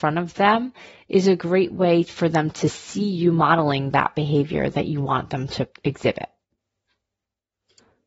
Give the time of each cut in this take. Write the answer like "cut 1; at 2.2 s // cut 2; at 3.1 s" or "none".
none